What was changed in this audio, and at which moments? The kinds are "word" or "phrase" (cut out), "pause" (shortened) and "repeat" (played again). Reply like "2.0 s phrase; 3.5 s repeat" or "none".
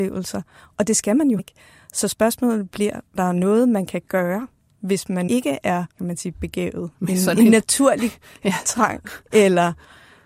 1.4 s word; 3.2 s word; 5.3 s word; 5.9 s pause; 6.9 s word